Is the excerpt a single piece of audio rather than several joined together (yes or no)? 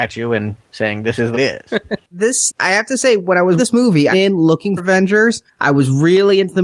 no